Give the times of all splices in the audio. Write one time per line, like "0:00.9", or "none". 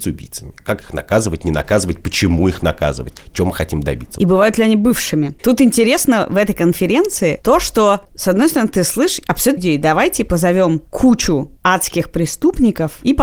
0:09.6
0:11.6